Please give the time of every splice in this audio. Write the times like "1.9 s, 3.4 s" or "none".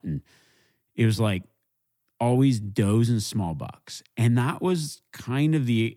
none